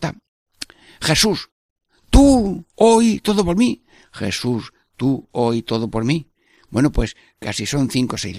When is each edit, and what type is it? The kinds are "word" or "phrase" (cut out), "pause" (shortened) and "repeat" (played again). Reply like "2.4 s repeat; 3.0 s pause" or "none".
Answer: none